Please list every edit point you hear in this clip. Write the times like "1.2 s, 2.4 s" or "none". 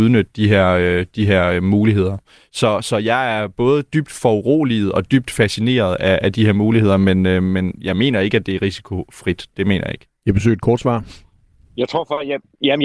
none